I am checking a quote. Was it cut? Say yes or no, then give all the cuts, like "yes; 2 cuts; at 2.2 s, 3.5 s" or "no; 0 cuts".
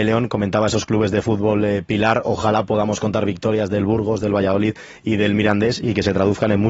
no; 0 cuts